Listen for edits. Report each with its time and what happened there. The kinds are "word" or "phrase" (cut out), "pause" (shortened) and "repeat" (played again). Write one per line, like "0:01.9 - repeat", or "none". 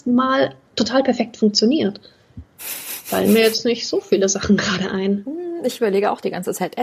0:02.5 - pause